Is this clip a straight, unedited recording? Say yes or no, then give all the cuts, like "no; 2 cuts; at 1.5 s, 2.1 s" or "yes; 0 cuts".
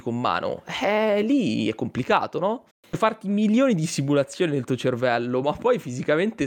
no; 1 cut; at 2.7 s